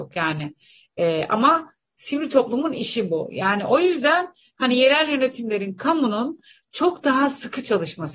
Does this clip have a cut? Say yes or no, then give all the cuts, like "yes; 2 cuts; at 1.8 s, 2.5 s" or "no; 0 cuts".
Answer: no; 0 cuts